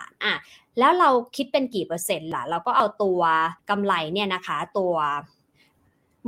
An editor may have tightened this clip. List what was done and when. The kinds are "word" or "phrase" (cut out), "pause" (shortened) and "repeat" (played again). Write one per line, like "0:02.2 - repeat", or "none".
0:03.6 - pause